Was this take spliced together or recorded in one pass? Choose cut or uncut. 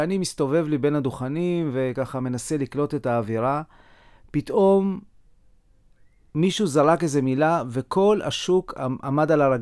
uncut